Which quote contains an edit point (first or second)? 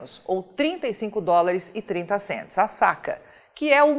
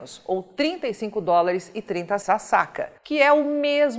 second